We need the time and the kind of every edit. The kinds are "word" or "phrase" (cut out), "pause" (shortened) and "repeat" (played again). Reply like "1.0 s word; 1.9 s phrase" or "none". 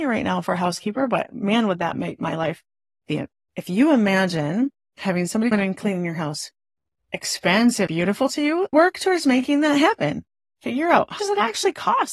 5.5 s word; 7.0 s word; 7.9 s word; 8.7 s word; 11.2 s word